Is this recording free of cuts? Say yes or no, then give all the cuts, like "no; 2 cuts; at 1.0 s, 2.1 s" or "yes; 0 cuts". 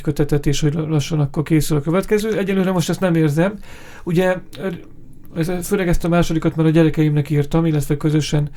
yes; 0 cuts